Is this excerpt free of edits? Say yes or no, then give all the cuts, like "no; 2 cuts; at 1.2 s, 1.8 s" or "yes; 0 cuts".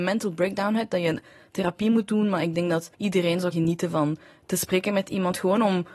no; 2 cuts; at 2.9 s, 3.5 s